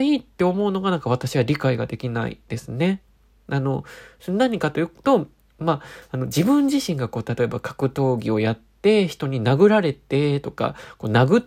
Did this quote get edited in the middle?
no; 0 cuts

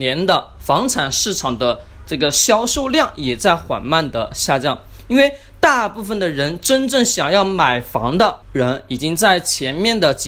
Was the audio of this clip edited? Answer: yes; 1 cut; at 8.4 s

